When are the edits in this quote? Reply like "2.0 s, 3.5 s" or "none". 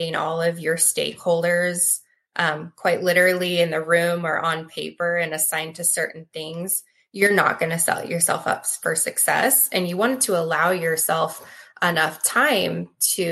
none